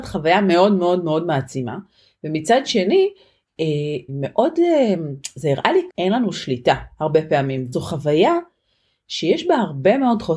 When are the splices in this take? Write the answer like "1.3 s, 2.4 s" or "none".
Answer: 4.1 s, 5.9 s, 6.9 s, 7.7 s